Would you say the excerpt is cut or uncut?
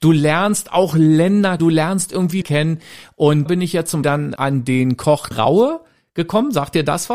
cut